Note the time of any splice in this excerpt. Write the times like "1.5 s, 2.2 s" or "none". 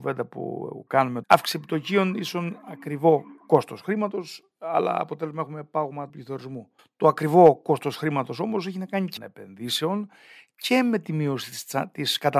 1.2 s, 6.1 s, 6.8 s, 9.2 s